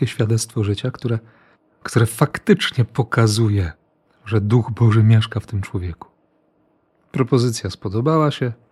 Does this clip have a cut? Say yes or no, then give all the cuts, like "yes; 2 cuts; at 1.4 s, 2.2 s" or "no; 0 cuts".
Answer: no; 0 cuts